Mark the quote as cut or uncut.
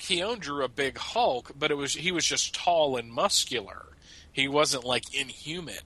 uncut